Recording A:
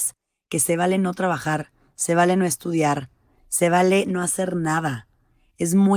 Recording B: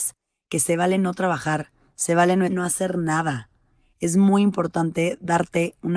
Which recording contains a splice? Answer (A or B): B